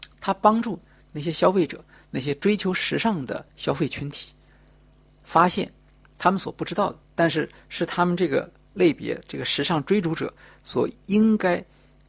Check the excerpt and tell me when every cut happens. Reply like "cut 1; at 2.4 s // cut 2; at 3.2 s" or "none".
cut 1; at 3.5 s // cut 2; at 7.0 s